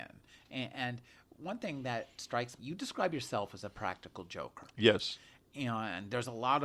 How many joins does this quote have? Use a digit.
1